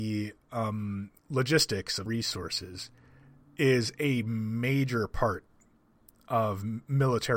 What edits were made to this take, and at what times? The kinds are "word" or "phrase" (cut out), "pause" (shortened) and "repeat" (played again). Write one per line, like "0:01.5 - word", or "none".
0:01.2 - pause
0:02.1 - word